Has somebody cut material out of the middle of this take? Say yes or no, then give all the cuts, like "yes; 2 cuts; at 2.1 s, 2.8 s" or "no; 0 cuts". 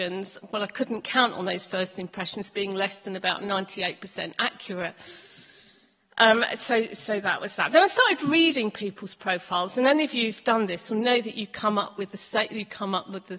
no; 0 cuts